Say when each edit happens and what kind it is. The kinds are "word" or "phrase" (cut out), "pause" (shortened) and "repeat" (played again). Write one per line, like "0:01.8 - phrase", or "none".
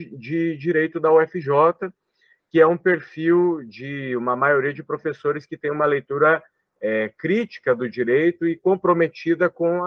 none